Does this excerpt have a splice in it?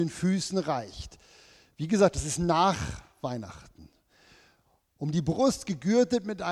no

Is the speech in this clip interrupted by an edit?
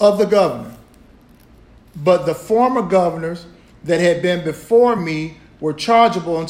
no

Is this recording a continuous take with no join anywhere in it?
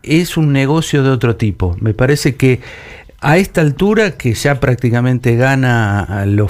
yes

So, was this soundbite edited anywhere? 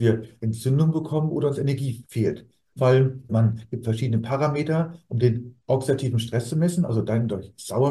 yes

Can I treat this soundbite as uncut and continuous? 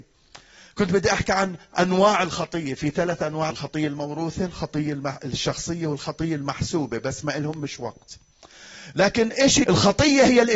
no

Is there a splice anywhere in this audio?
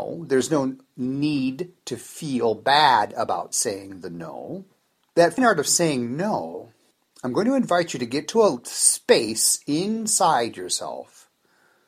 yes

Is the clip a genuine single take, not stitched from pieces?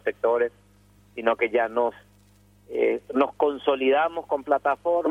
yes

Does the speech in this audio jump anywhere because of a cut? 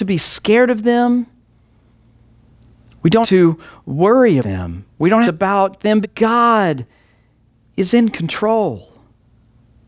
yes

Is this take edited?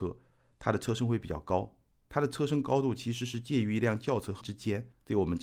yes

